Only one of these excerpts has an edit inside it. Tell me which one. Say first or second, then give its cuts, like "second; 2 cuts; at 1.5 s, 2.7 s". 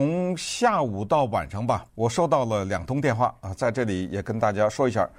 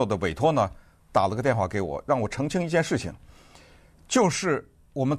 first; 1 cut; at 1.9 s